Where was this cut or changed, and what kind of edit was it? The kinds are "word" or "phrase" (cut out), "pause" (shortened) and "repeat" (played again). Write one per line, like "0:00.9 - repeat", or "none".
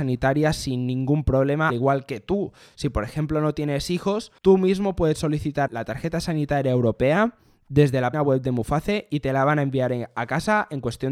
0:01.7 - word
0:04.4 - pause
0:05.7 - word
0:08.1 - word